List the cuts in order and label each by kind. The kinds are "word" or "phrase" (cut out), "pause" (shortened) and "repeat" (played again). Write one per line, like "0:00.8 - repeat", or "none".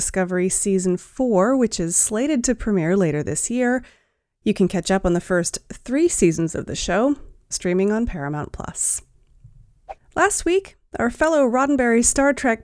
0:07.5 - word

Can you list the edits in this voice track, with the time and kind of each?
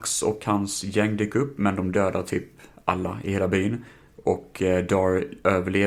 none

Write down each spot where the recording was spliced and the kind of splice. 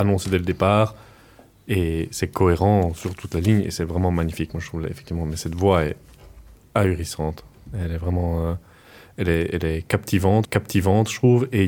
0:10.4 - repeat

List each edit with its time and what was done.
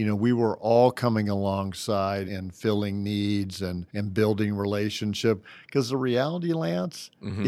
0:02.3 - word
0:03.9 - pause

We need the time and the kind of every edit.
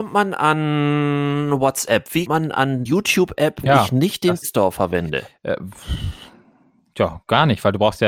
0:02.3 - word
0:02.9 - word
0:03.6 - word
0:04.4 - word

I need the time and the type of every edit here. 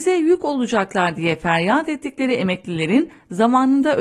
none

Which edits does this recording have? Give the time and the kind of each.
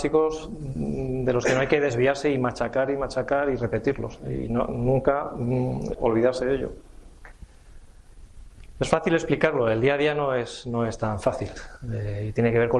0:05.9 - word

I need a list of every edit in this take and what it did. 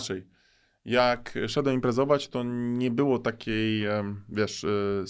none

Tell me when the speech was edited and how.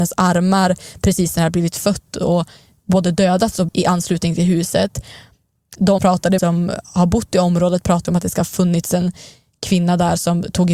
0:03.7 - word
0:06.0 - word
0:06.4 - word
0:08.1 - word

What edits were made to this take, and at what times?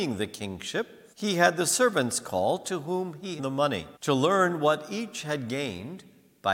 0:01.1 - pause
0:03.4 - phrase
0:04.0 - pause

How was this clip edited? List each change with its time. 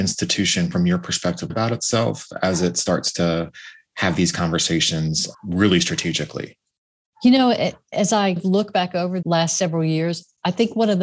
0:01.5 - word
0:05.3 - word
0:08.4 - word
0:09.2 - word

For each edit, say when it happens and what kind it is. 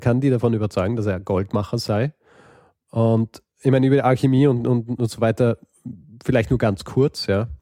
none

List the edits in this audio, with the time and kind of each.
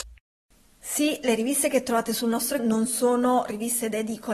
0:02.6 - word

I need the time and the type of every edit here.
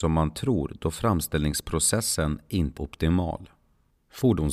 0:02.8 - word

